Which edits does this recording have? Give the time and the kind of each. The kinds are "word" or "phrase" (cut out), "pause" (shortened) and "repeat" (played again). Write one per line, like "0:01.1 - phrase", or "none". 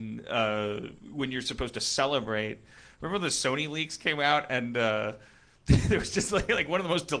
none